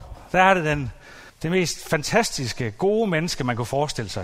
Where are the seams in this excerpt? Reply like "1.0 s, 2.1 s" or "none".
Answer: 1.3 s